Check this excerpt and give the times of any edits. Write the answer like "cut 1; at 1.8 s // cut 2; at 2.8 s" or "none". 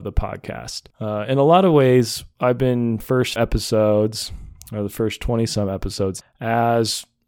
cut 1; at 0.9 s // cut 2; at 3.0 s // cut 3; at 3.4 s // cut 4; at 6.2 s